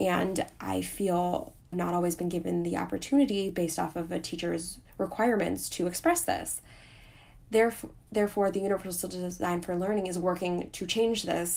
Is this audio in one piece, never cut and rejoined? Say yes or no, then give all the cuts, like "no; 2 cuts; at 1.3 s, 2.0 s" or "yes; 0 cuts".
no; 2 cuts; at 1.7 s, 4.9 s